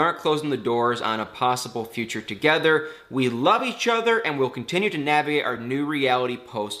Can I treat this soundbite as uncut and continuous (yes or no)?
yes